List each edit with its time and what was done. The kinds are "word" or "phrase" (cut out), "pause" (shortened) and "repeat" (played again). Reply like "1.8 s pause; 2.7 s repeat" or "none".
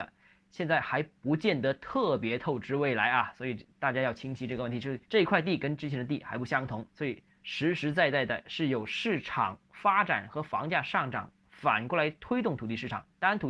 5.1 s pause; 6.9 s pause